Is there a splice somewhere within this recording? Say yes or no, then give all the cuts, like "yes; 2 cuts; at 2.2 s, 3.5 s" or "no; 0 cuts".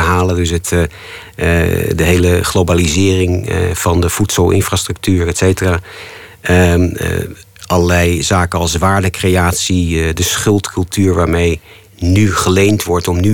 no; 0 cuts